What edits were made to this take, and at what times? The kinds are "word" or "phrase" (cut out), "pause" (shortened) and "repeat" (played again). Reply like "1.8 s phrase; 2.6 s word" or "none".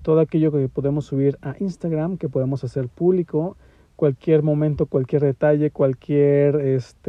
none